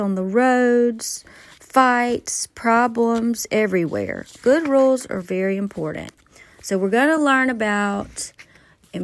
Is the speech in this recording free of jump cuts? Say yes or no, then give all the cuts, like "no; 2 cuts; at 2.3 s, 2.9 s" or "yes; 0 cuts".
yes; 0 cuts